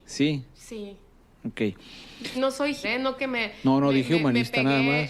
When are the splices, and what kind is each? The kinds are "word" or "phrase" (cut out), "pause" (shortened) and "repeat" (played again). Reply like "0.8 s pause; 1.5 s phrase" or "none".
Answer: 2.3 s word; 2.8 s word; 3.2 s word